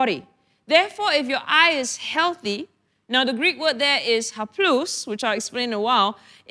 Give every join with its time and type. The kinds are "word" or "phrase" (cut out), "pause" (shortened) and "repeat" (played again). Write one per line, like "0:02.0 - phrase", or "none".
none